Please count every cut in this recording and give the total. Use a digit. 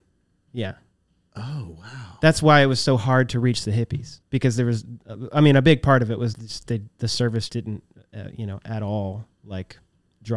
4